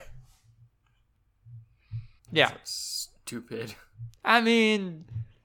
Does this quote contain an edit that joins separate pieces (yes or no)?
yes